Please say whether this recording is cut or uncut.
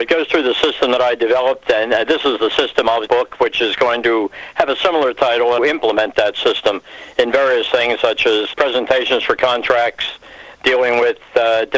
cut